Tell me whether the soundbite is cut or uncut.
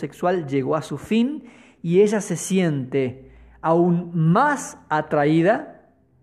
uncut